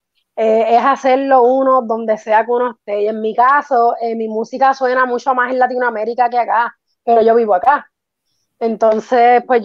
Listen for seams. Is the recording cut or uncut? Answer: uncut